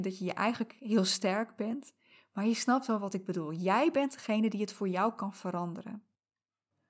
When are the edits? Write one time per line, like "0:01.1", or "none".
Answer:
none